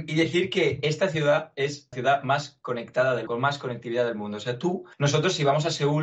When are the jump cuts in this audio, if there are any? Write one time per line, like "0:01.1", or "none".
0:01.9
0:03.3
0:04.9